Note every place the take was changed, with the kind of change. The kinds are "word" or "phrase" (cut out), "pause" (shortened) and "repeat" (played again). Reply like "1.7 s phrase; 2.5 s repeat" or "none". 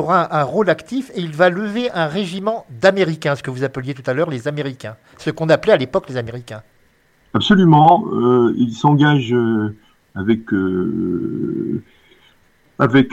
none